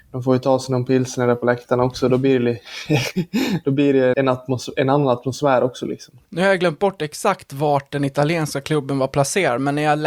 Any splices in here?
yes; 2 cuts; at 4.1 s, 6.2 s

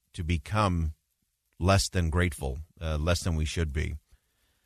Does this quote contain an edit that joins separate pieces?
no; 0 cuts

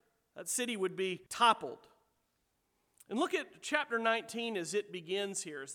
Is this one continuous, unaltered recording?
no; 1 cut; at 1.3 s

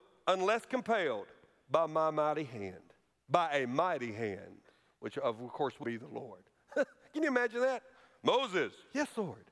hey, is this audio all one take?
no; 1 cut; at 5.8 s

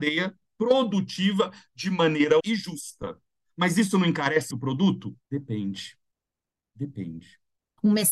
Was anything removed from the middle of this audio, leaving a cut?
yes; 3 cuts; at 2.4 s, 4.5 s, 5.2 s

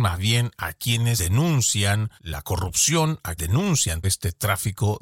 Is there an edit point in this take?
yes; 4 cuts; at 1.2 s, 2.2 s, 3.4 s, 4.0 s

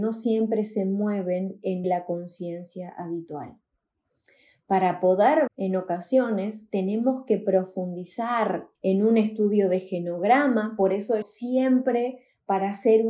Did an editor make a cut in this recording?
yes; 4 cuts; at 1.8 s, 5.5 s, 8.7 s, 11.2 s

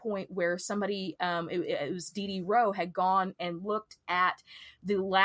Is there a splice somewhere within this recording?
no; 0 cuts

